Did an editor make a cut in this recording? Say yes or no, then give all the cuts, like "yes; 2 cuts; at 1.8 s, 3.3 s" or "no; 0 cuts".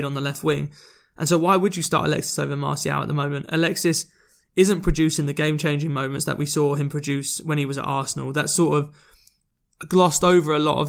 no; 0 cuts